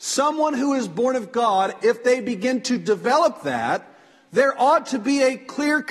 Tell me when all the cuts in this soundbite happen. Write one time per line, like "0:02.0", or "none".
none